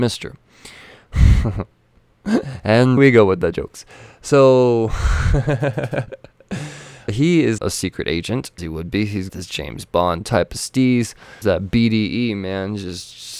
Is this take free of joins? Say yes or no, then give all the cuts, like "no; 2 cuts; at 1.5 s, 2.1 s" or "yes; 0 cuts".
no; 6 cuts; at 3.0 s, 7.1 s, 7.6 s, 8.6 s, 9.3 s, 11.4 s